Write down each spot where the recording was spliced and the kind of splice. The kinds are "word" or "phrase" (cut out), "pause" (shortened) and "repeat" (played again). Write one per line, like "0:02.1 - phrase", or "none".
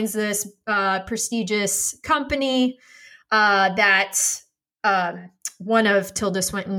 none